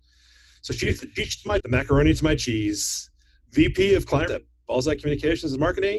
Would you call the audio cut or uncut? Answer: cut